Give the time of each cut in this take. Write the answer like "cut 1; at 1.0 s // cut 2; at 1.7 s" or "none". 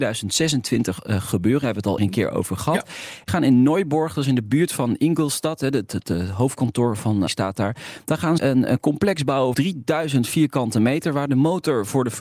cut 1; at 2.0 s // cut 2; at 3.3 s // cut 3; at 7.3 s // cut 4; at 8.4 s // cut 5; at 9.5 s